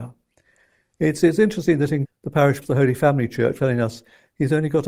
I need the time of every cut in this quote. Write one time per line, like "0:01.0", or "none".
0:02.0
0:02.6
0:03.6